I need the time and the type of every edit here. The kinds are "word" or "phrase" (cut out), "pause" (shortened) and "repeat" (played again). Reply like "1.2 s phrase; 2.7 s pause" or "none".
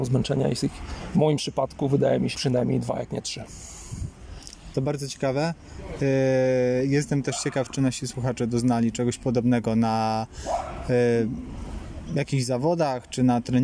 2.3 s word

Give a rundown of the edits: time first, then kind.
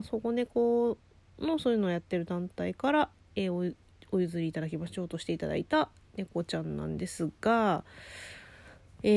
none

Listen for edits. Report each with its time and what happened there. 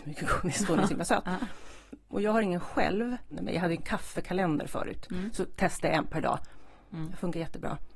none

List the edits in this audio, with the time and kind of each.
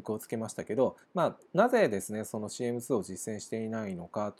1.0 s pause

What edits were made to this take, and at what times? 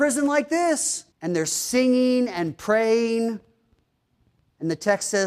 1.1 s pause

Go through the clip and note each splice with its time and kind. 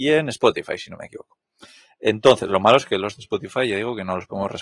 none

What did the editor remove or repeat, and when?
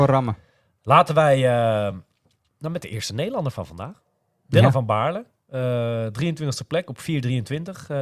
none

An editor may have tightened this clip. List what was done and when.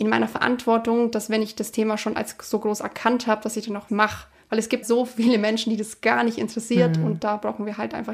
3.9 s word; 4.8 s word

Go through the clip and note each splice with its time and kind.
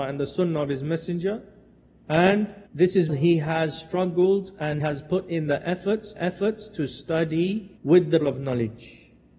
2.7 s pause; 3.1 s word; 4.8 s word; 6.2 s repeat; 7.8 s pause; 8.2 s word

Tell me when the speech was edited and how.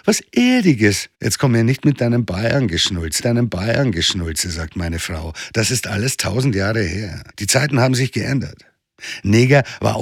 1.1 s pause; 3.2 s repeat; 7.3 s pause

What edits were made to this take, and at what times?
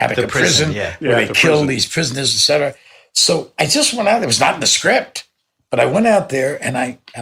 none

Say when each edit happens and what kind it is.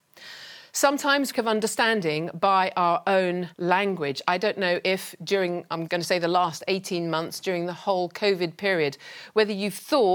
1.3 s phrase; 3.5 s pause; 5.9 s word

